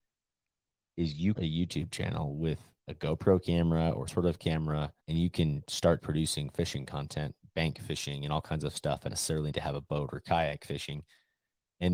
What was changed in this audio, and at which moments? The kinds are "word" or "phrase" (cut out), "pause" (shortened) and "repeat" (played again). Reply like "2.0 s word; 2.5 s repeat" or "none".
1.4 s phrase; 2.8 s pause; 4.1 s word; 5.0 s pause; 6.0 s word; 9.1 s word; 9.5 s word